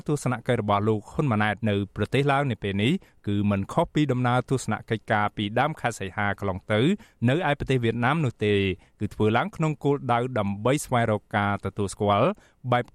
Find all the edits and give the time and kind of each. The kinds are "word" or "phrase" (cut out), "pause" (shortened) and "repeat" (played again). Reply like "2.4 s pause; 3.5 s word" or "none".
1.6 s pause